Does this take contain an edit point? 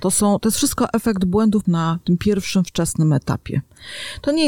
yes; 1 cut; at 1.6 s

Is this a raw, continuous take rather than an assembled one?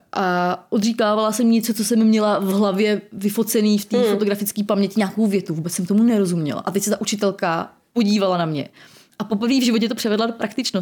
yes; 0 cuts

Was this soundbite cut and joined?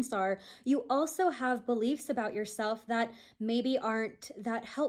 no; 0 cuts

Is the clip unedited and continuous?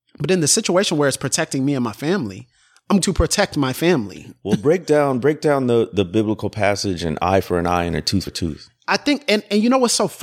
no; 2 cuts; at 3.0 s, 8.3 s

